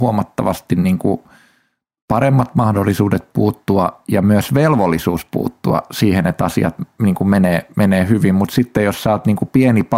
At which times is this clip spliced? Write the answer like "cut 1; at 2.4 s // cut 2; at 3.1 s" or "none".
none